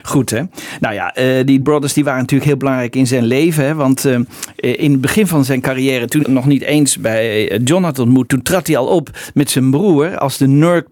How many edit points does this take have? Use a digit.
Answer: 3